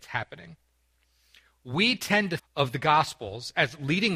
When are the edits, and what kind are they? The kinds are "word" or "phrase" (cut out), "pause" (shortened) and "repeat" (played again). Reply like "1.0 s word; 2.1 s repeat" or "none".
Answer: 2.4 s word